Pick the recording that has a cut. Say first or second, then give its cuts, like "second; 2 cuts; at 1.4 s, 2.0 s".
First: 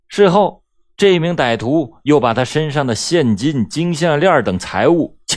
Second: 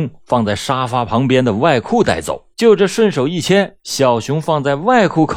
second; 2 cuts; at 2.5 s, 3.8 s